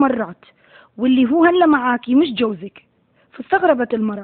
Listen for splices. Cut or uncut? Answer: uncut